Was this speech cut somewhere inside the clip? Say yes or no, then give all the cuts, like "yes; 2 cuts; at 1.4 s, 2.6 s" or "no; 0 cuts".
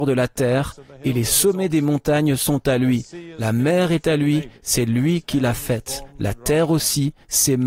no; 0 cuts